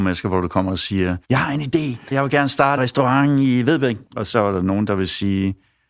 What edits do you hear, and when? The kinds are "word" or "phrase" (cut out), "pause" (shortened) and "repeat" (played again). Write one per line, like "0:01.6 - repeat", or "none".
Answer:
0:01.2 - pause
0:02.1 - word
0:02.8 - word
0:04.1 - pause

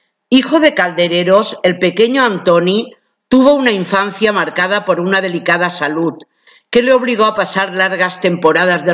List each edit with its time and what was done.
none

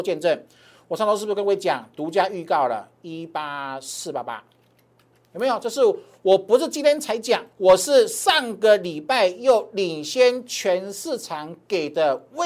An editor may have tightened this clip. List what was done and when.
0:07.5 - pause

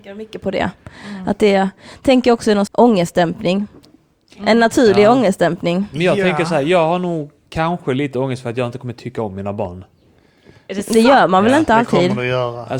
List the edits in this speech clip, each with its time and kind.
0:02.7 - word

